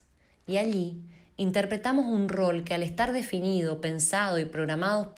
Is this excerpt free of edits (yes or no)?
yes